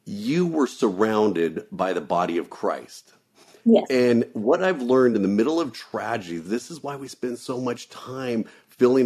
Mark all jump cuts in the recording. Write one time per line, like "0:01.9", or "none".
none